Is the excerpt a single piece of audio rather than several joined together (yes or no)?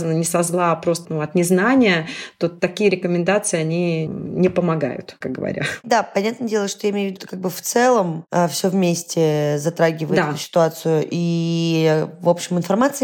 no